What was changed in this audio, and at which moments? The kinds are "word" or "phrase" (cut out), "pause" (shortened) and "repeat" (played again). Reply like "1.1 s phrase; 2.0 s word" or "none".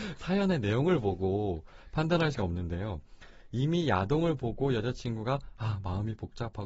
2.3 s word